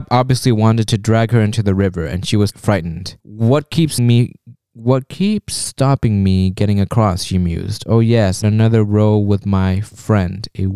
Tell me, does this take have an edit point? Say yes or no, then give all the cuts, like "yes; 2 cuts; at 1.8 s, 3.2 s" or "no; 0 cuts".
yes; 5 cuts; at 2.5 s, 3.2 s, 4.0 s, 4.5 s, 8.4 s